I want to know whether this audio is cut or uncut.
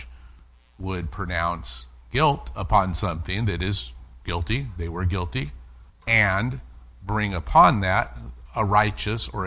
cut